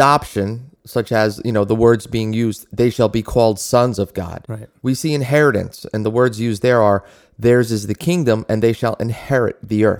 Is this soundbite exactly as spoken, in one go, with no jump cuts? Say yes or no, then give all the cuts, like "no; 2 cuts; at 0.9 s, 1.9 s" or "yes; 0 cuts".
yes; 0 cuts